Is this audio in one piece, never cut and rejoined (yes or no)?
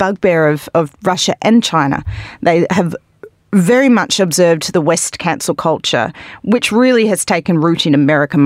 yes